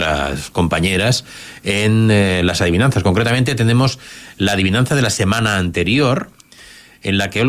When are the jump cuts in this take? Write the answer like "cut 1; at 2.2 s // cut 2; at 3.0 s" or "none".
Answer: none